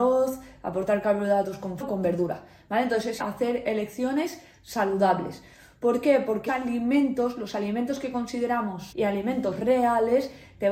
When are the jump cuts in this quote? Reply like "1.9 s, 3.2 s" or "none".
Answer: 1.8 s, 3.2 s, 6.5 s, 8.9 s